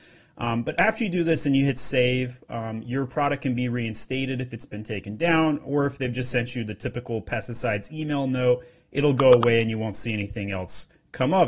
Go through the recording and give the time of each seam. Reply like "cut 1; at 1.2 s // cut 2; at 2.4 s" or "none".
none